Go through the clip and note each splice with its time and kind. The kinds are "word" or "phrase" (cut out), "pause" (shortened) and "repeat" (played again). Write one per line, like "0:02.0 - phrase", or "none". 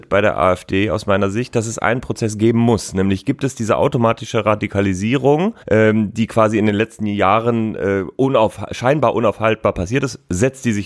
0:05.6 - pause